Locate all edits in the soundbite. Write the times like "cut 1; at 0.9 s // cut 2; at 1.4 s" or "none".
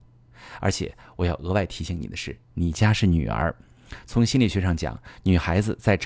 cut 1; at 2.4 s